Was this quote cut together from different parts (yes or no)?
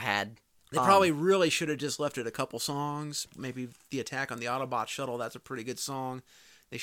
no